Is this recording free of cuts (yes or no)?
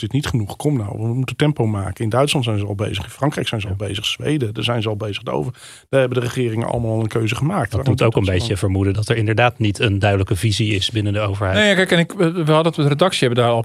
yes